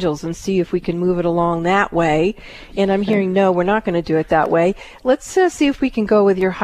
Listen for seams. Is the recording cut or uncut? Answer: uncut